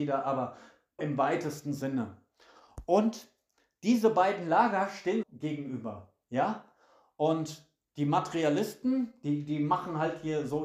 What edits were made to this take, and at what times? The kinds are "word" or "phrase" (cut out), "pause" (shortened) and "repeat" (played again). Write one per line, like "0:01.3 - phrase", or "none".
0:01.0 - word
0:05.2 - phrase